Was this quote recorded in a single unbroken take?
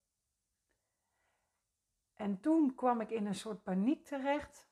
yes; 0 cuts

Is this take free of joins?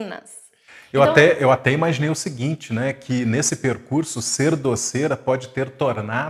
yes; 0 cuts

